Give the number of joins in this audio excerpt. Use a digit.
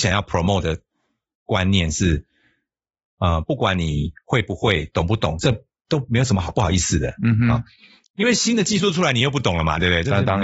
0